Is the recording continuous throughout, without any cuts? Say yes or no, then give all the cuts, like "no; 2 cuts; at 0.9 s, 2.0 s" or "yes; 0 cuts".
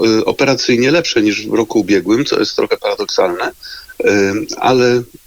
yes; 0 cuts